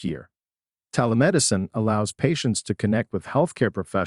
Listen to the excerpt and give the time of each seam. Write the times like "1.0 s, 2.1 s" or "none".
none